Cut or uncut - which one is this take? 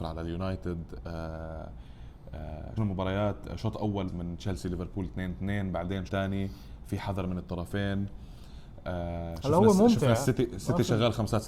cut